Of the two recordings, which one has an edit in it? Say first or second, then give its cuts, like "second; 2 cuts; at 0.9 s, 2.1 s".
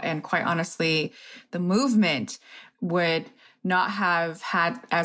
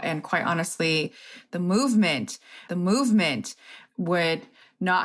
second; 1 cut; at 2.7 s